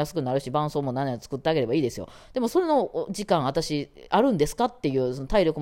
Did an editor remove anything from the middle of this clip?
no; 0 cuts

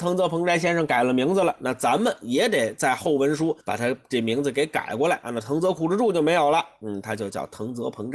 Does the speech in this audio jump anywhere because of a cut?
yes; 1 cut; at 3.6 s

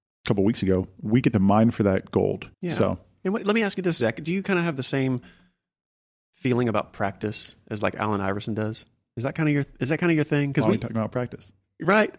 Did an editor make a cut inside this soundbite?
yes; 1 cut; at 2.5 s

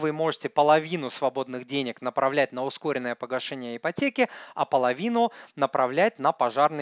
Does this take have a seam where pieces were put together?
no; 0 cuts

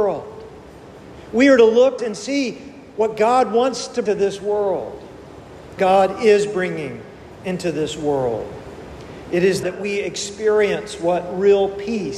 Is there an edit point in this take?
yes; 4 cuts; at 2.0 s, 4.1 s, 5.8 s, 9.6 s

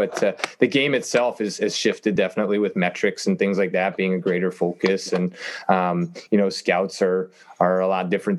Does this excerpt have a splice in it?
no; 0 cuts

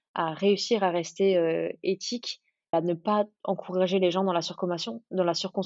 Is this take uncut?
no; 1 cut; at 2.7 s

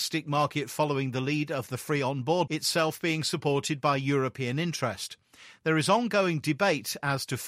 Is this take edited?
yes; 1 cut; at 2.5 s

